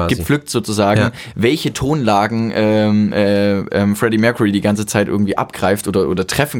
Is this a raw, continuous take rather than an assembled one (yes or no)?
yes